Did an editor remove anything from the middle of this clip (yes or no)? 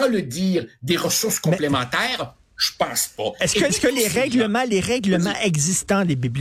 yes